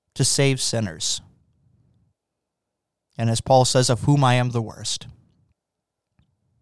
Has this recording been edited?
no; 0 cuts

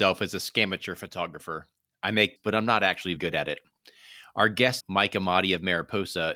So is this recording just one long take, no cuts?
no; 3 cuts; at 2.4 s, 3.2 s, 4.8 s

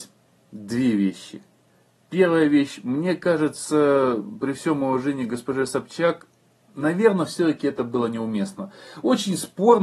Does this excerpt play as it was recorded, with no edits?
yes; 0 cuts

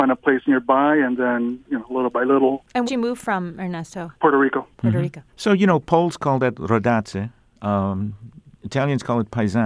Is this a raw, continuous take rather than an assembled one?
no; 3 cuts; at 2.9 s, 4.1 s, 5.3 s

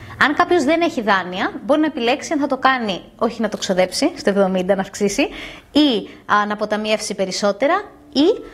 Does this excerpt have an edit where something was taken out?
no; 0 cuts

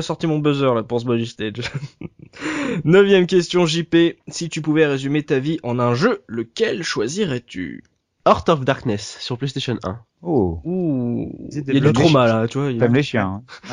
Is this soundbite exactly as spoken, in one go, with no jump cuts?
yes; 0 cuts

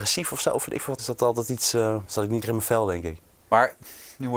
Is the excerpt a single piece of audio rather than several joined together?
no; 3 cuts; at 1.0 s, 2.1 s, 2.4 s

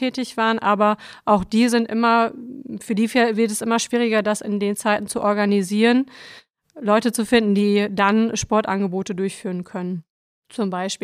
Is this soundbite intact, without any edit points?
yes; 0 cuts

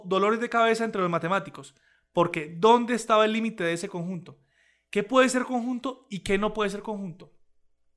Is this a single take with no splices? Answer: yes; 0 cuts

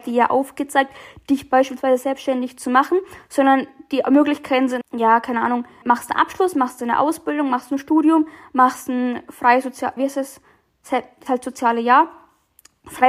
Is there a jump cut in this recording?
yes; 4 cuts; at 4.8 s, 5.8 s, 10.0 s, 11.3 s

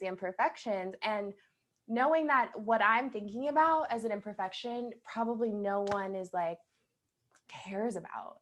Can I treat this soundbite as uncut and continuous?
yes; 0 cuts

